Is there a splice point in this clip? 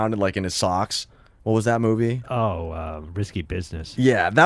no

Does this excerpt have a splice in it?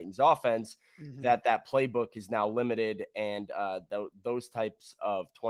no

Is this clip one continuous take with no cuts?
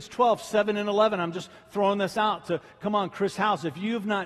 yes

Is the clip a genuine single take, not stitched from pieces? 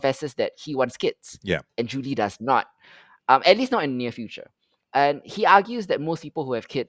yes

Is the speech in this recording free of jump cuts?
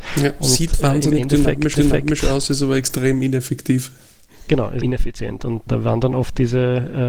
no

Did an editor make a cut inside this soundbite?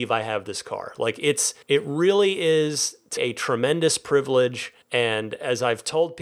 yes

